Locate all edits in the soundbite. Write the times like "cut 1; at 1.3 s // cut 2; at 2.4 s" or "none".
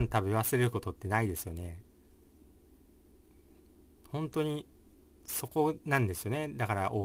none